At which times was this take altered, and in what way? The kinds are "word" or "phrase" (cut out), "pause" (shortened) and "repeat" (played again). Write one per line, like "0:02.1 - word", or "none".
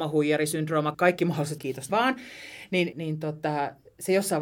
0:00.9 - word
0:01.6 - word
0:01.9 - word
0:02.9 - word

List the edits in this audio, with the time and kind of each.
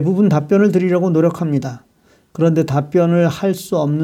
none

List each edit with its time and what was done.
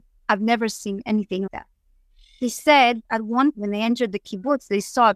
0:01.5 - word
0:03.0 - word
0:03.5 - word

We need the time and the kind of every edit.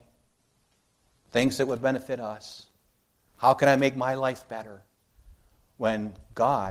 none

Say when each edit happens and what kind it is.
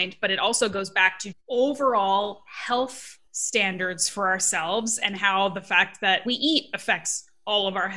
0:01.3 - word
0:03.3 - pause
0:06.3 - word

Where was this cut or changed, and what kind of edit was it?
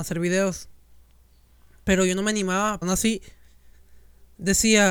0:02.8 - word

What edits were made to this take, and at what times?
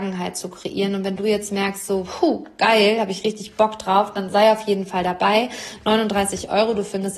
none

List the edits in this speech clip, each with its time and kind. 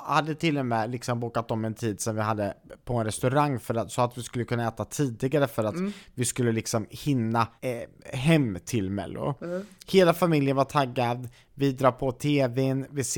0:07.6 - pause

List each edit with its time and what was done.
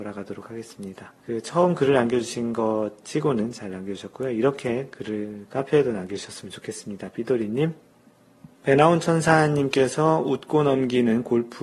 0:01.2 - pause
0:08.5 - pause

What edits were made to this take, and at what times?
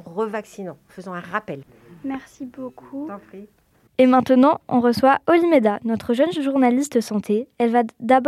none

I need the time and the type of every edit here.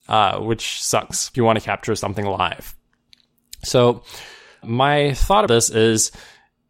0:01.3 - word
0:04.6 - word
0:05.5 - word

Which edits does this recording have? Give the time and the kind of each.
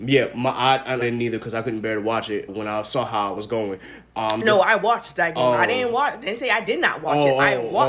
0:01.0 - phrase
0:02.5 - word

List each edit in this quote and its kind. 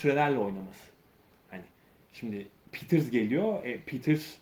0:02.6 - pause

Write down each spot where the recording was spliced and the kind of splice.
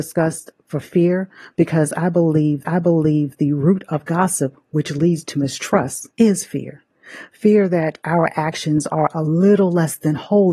0:02.7 - repeat
0:06.1 - pause

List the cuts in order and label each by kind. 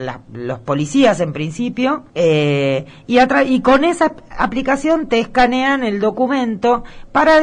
0:02.1 - pause

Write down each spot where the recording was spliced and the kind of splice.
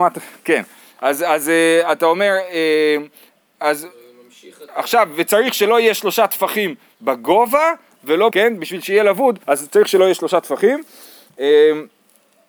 0:08.3 - word
0:09.4 - pause

